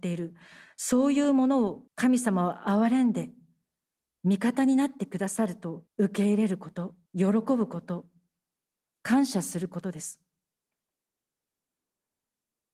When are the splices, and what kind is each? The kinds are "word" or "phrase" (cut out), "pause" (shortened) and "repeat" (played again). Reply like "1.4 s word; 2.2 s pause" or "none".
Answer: 1.9 s pause; 5.9 s pause; 7.1 s pause